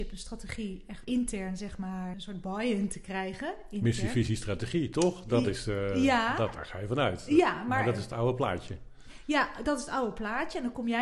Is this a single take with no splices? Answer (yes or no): no